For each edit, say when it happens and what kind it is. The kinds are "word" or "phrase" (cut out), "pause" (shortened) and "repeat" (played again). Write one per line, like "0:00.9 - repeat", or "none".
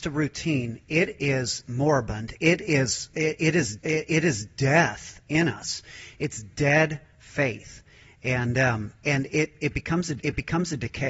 0:03.8 - repeat
0:10.2 - repeat